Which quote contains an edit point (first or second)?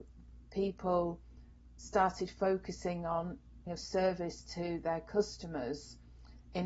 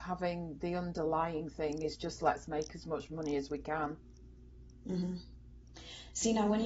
first